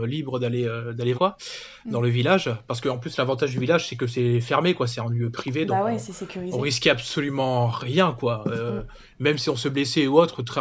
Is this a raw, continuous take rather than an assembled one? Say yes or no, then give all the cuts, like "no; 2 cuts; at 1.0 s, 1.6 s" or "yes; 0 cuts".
no; 1 cut; at 1.1 s